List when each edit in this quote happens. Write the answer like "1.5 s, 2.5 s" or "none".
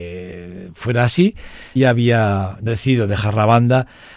1.8 s, 2.7 s